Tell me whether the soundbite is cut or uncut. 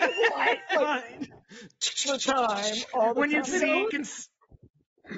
cut